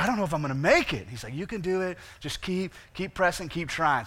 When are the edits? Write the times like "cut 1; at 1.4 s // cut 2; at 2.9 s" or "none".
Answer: none

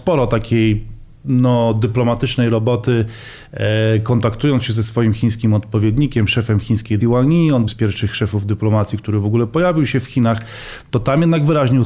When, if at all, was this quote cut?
cut 1; at 7.0 s // cut 2; at 7.7 s

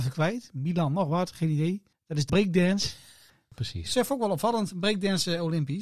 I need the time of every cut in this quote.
cut 1; at 1.9 s // cut 2; at 2.3 s

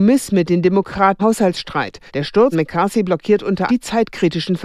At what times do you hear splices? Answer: cut 1; at 1.2 s // cut 2; at 2.1 s // cut 3; at 2.5 s // cut 4; at 3.7 s

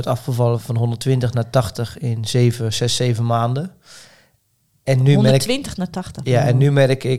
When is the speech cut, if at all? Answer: none

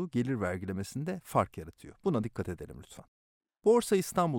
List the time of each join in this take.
none

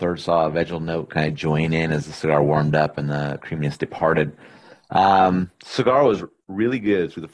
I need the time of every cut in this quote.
none

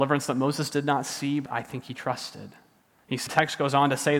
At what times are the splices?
cut 1; at 1.5 s // cut 2; at 2.8 s // cut 3; at 3.3 s

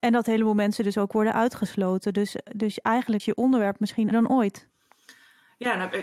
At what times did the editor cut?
cut 1; at 3.2 s // cut 2; at 4.1 s

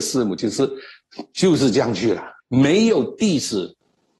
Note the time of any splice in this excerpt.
cut 1; at 2.4 s

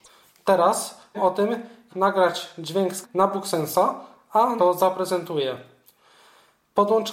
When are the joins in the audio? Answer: cut 1; at 1.1 s // cut 2; at 1.9 s // cut 3; at 3.0 s // cut 4; at 4.6 s

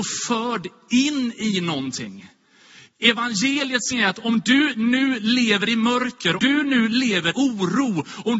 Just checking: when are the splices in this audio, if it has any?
cut 1; at 3.9 s // cut 2; at 6.4 s // cut 3; at 7.3 s

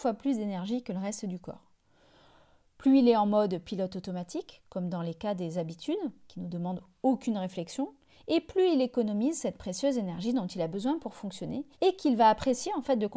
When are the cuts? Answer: cut 1; at 11.7 s

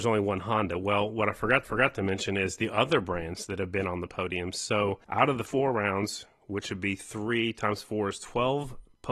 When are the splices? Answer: cut 1; at 1.6 s // cut 2; at 5.0 s // cut 3; at 5.5 s

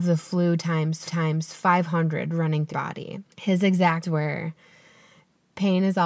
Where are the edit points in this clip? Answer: cut 1; at 1.1 s // cut 2; at 2.7 s // cut 3; at 3.3 s // cut 4; at 4.0 s

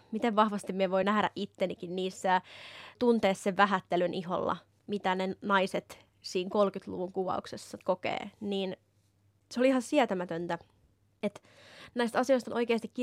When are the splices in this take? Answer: none

